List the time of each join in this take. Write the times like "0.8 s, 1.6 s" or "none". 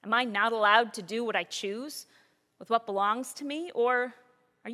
none

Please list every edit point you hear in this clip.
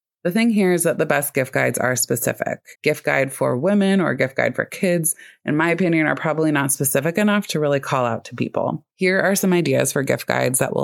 2.7 s, 8.9 s

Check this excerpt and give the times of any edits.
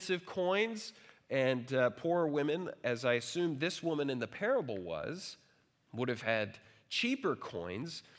none

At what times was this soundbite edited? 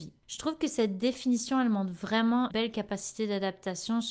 2.5 s

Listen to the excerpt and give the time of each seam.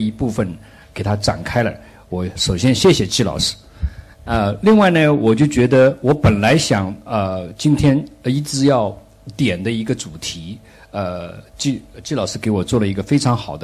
none

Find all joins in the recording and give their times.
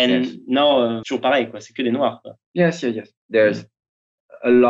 1.0 s, 3.2 s

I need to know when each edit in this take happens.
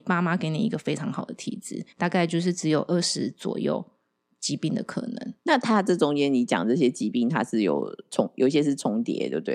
1.9 s

